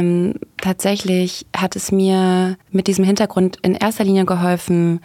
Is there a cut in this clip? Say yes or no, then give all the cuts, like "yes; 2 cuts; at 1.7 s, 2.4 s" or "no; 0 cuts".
yes; 1 cut; at 2.6 s